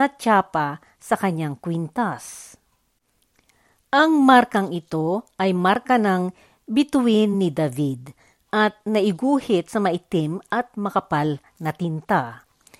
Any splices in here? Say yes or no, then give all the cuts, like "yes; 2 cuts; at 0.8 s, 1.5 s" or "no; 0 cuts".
no; 0 cuts